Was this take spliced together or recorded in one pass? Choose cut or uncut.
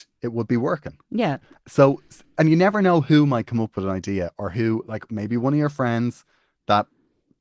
uncut